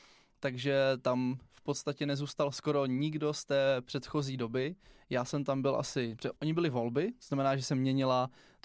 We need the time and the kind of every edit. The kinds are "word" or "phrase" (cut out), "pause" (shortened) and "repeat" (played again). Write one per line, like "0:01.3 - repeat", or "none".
0:06.4 - pause

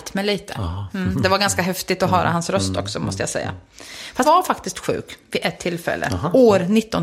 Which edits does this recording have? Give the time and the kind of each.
0:04.2 - word

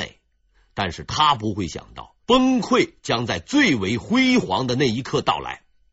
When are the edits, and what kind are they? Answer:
0:02.2 - pause

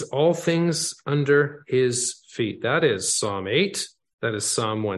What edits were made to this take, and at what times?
none

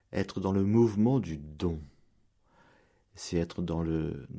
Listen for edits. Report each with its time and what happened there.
none

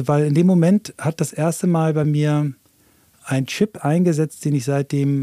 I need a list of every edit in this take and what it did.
none

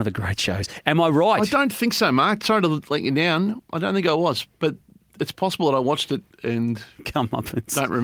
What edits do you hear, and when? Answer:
none

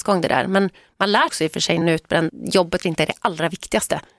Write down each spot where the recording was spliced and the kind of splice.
0:01.3 - word
0:01.8 - word
0:02.3 - word
0:02.8 - word

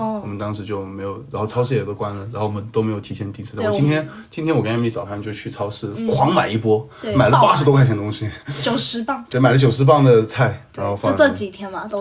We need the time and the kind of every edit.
0:09.3 - phrase

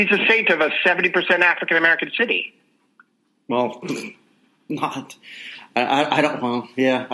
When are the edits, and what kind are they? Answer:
none

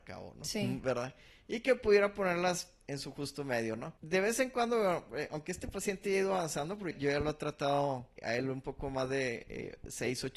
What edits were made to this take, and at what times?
0:04.0 - pause
0:06.9 - word
0:08.2 - word

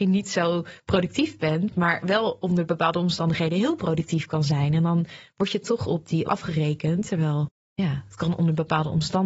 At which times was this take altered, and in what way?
0:06.3 - phrase
0:07.6 - pause

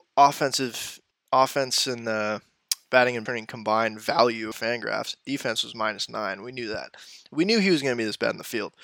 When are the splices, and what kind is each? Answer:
0:01.1 - pause
0:03.3 - word
0:04.5 - phrase

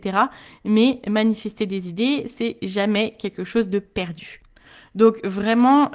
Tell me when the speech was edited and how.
none

